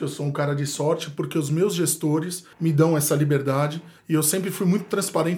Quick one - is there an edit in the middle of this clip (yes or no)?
yes